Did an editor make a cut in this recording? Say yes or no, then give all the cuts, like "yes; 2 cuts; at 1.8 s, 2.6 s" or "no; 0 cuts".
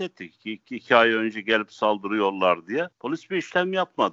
yes; 1 cut; at 2.9 s